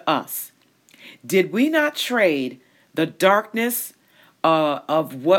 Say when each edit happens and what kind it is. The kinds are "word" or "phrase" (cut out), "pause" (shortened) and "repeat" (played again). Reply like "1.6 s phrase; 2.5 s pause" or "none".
none